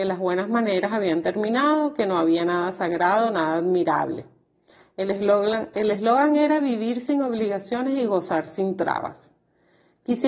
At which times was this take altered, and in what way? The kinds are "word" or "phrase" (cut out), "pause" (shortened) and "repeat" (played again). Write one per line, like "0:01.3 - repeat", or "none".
none

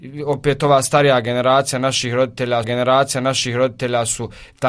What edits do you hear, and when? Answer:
0:02.6 - repeat

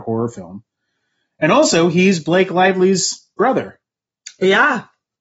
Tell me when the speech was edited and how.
none

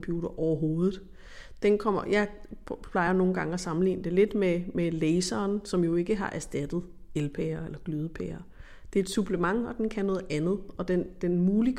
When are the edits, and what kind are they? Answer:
none

